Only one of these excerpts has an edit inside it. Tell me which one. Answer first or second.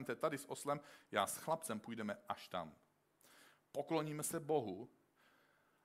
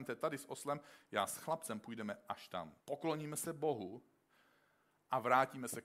second